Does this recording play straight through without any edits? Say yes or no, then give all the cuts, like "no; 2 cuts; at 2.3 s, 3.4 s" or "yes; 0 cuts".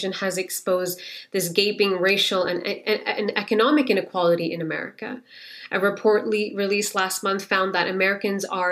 yes; 0 cuts